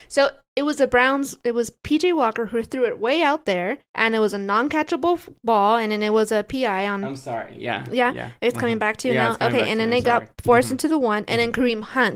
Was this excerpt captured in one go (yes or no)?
no